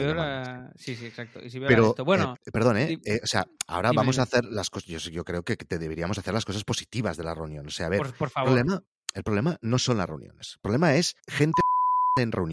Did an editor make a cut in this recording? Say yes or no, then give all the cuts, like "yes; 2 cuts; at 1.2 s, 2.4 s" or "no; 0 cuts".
yes; 2 cuts; at 2.3 s, 11.2 s